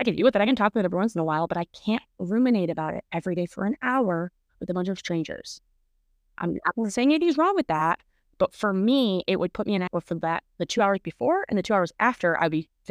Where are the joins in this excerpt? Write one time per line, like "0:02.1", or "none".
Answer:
0:09.9